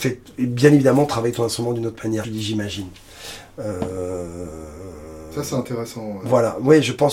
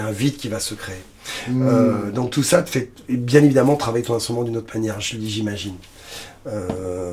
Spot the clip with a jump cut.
first; 1 cut; at 2.2 s

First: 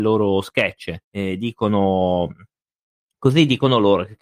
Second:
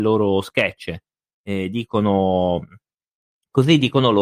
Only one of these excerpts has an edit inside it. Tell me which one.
first; 1 cut; at 1.0 s

